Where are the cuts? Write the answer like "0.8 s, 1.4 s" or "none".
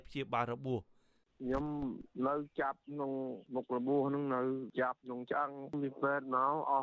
none